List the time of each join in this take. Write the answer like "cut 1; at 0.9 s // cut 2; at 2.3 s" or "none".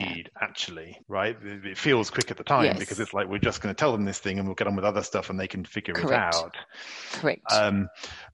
cut 1; at 1.0 s

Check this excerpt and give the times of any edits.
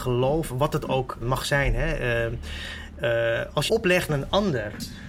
cut 1; at 1.2 s // cut 2; at 3.7 s // cut 3; at 4.1 s

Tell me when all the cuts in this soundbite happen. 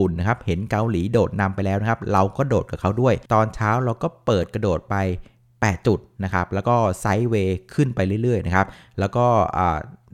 cut 1; at 3.3 s

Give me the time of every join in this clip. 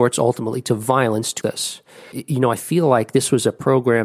cut 1; at 1.4 s // cut 2; at 2.1 s

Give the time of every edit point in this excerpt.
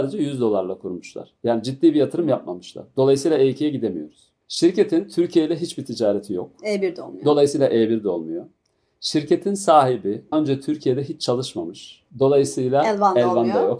cut 1; at 4.4 s // cut 2; at 10.3 s // cut 3; at 12.1 s

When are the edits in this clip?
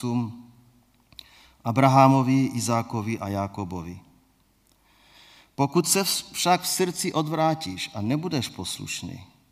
none

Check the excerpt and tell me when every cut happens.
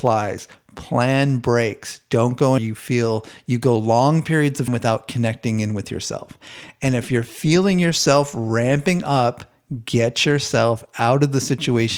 cut 1; at 2.6 s // cut 2; at 4.7 s

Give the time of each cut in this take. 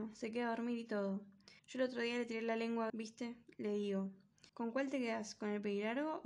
cut 1; at 1.6 s // cut 2; at 2.9 s // cut 3; at 4.5 s

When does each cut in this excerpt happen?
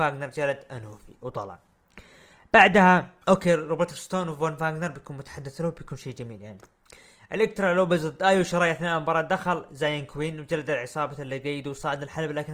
cut 1; at 3.2 s

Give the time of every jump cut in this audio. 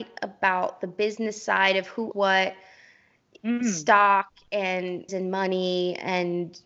cut 1; at 2.1 s // cut 2; at 5.1 s

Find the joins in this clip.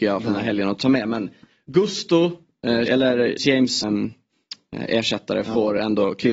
cut 1; at 2.9 s // cut 2; at 3.4 s // cut 3; at 3.8 s

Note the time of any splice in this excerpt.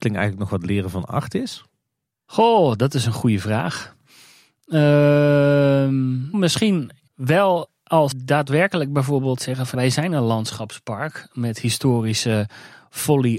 cut 1; at 6.3 s // cut 2; at 7.1 s // cut 3; at 8.1 s // cut 4; at 9.7 s

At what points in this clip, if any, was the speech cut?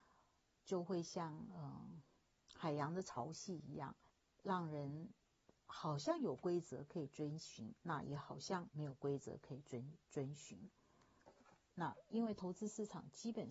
cut 1; at 2.2 s // cut 2; at 4.1 s // cut 3; at 7.8 s

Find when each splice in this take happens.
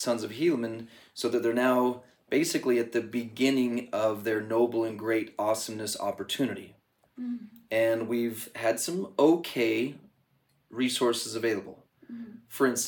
none

